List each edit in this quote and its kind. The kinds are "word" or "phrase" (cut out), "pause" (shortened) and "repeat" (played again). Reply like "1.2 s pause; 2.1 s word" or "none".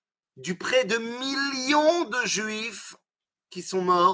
none

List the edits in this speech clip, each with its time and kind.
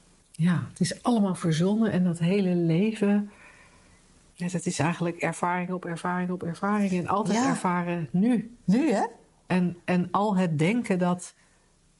none

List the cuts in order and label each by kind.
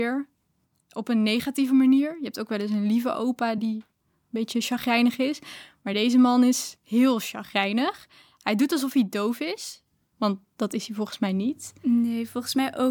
none

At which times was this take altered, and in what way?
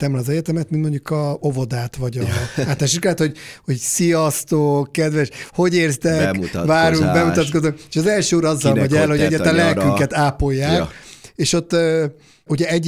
none

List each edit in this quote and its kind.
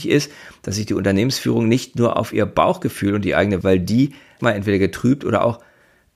3.6 s phrase; 4.4 s word

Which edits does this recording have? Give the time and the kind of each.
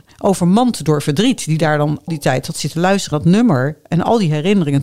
2.1 s word; 3.1 s word

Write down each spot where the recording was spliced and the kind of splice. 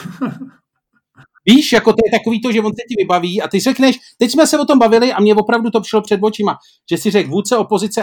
none

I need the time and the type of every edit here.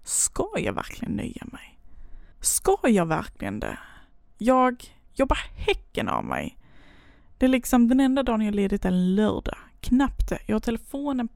2.3 s pause

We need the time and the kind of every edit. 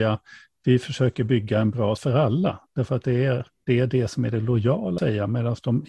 2.0 s word; 5.0 s word

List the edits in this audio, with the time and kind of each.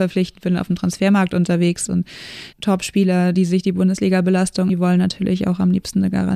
1.9 s word; 2.5 s word; 4.7 s word

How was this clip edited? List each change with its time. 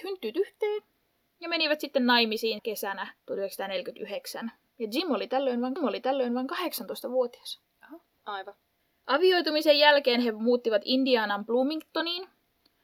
2.6 s word; 3.2 s pause; 5.8 s repeat

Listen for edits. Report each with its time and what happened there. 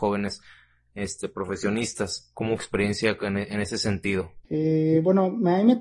2.6 s phrase; 4.4 s pause

